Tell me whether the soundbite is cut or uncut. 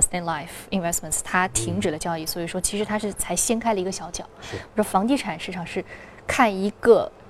uncut